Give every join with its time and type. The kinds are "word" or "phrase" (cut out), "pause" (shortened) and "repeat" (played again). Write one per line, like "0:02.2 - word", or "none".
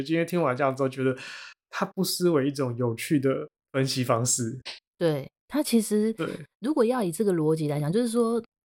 0:03.6 - pause
0:05.4 - pause

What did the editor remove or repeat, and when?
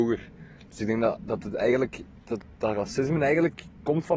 none

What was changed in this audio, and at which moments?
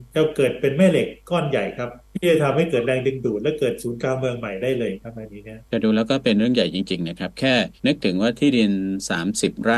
0:02.0 - pause
0:05.7 - pause
0:07.8 - pause

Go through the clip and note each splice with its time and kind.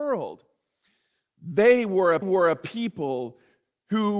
0:02.2 - repeat

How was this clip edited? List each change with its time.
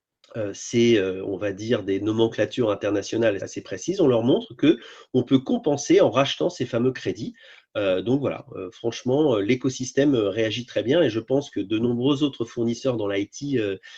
0:03.4 - word

